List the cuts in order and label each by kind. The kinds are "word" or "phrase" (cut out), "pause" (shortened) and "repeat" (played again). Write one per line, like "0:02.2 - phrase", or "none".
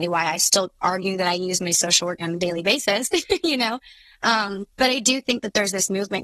0:02.2 - word
0:04.7 - pause